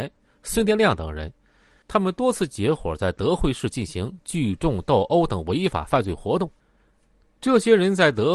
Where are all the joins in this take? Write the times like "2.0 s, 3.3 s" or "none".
none